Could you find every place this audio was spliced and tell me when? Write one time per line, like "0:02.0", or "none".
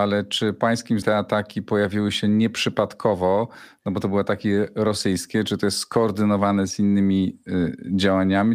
0:01.0

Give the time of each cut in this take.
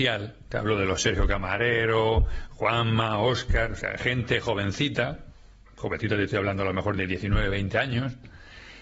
none

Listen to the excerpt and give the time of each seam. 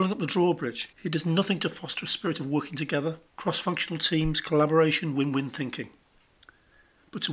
0:00.9
0:03.3

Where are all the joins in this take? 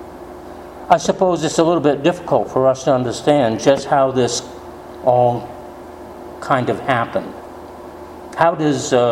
none

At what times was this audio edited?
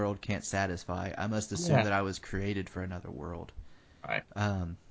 none

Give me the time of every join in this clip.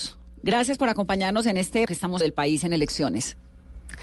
0:01.9
0:02.2

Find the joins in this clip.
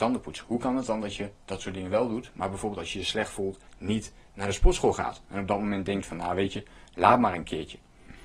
0:03.7

